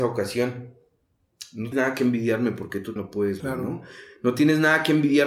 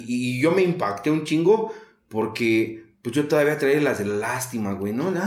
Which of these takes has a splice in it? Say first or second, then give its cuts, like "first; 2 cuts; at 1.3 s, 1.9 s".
first; 3 cuts; at 1.7 s, 3.0 s, 3.4 s